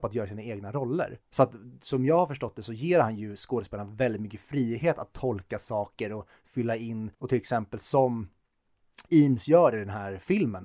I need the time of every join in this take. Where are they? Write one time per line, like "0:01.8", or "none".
0:01.2
0:07.1